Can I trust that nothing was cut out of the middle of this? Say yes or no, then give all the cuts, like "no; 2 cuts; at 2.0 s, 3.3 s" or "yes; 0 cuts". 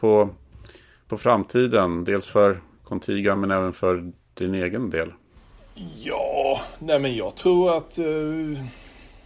yes; 0 cuts